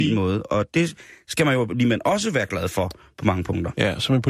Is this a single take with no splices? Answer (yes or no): yes